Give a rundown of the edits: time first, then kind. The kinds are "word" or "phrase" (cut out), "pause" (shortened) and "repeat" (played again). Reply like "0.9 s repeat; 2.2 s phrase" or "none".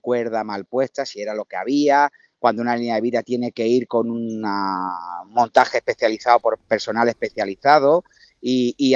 none